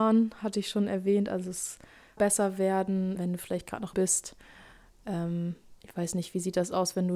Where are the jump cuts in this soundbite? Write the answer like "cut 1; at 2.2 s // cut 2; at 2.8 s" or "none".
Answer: cut 1; at 2.2 s // cut 2; at 3.2 s // cut 3; at 3.9 s // cut 4; at 5.8 s